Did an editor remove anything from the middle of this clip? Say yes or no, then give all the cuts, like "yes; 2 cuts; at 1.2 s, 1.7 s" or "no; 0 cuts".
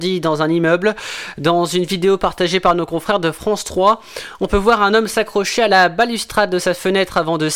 no; 0 cuts